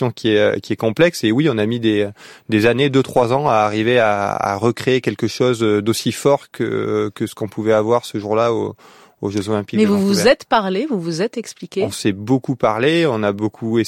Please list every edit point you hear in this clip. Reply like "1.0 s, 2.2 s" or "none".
none